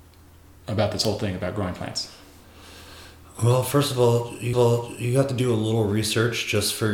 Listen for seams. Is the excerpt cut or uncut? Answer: cut